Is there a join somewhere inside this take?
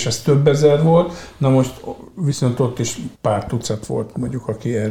yes; 1 cut; at 3.1 s

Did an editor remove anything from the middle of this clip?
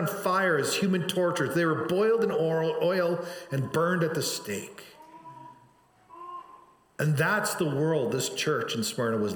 no; 0 cuts

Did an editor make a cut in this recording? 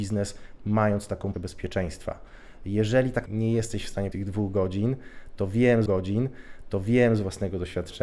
yes; 4 cuts; at 1.3 s, 3.3 s, 4.1 s, 5.9 s

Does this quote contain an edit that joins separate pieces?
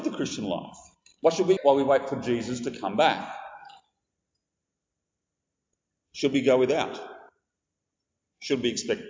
yes; 1 cut; at 1.6 s

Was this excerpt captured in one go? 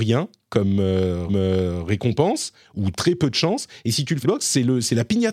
no; 2 cuts; at 1.3 s, 4.2 s

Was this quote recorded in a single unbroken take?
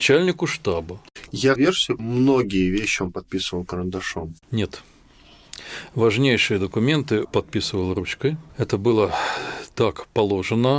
no; 5 cuts; at 1.5 s, 2.0 s, 4.4 s, 7.2 s, 8.5 s

